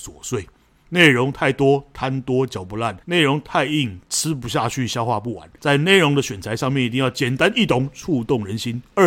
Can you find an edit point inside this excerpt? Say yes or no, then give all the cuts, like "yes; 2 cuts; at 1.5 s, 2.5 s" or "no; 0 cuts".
yes; 3 cuts; at 3.0 s, 4.0 s, 5.6 s